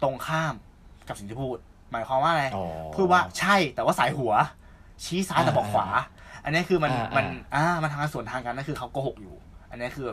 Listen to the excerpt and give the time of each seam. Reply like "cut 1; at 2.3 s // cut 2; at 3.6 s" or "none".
none